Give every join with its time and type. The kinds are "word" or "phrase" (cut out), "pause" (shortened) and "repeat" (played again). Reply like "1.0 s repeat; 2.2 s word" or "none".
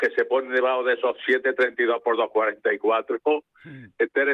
none